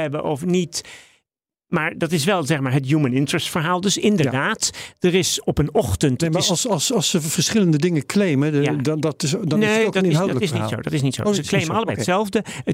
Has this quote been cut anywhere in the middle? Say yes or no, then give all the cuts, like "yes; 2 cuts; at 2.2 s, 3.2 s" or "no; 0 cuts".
no; 0 cuts